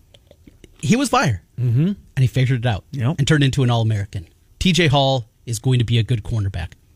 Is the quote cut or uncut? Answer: cut